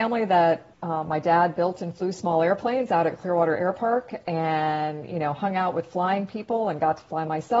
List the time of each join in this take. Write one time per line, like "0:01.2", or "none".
none